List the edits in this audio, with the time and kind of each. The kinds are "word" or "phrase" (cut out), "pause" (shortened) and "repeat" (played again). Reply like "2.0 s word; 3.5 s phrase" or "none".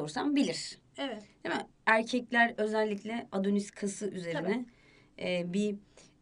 none